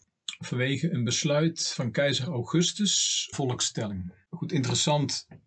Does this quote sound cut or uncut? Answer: cut